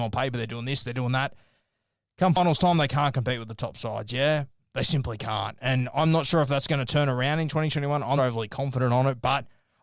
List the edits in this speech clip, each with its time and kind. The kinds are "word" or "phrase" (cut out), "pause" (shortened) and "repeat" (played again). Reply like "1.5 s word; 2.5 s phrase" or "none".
8.2 s word